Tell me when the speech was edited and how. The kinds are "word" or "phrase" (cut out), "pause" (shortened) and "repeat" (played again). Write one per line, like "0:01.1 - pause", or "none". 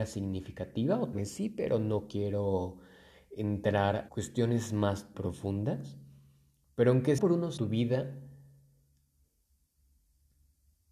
0:01.1 - word
0:04.1 - word
0:05.1 - word
0:07.2 - word
0:07.6 - word